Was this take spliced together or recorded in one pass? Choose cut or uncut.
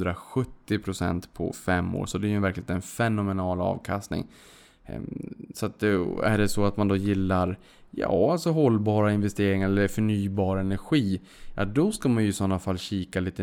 uncut